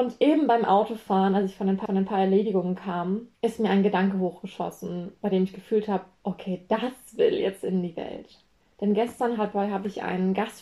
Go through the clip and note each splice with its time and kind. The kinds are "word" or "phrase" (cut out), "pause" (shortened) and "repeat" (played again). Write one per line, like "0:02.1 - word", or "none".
0:01.9 - repeat
0:03.3 - pause
0:08.6 - pause

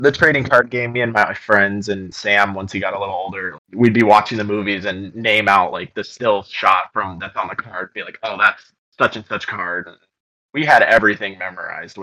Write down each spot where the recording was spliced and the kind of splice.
0:02.1 - word
0:03.6 - word

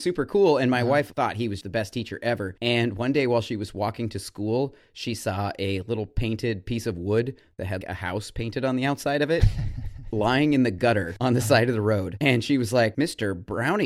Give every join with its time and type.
0:01.6 - word
0:07.8 - word

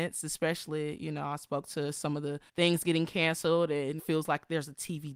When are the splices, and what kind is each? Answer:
0:02.5 - pause
0:04.0 - phrase

